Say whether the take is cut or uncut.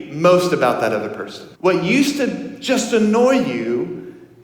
cut